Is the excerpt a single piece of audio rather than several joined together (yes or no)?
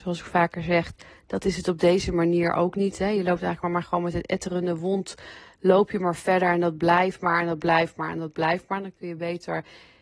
yes